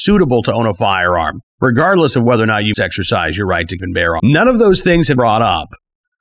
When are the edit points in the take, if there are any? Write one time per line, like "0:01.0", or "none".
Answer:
0:01.5
0:02.7
0:03.8
0:04.2
0:05.2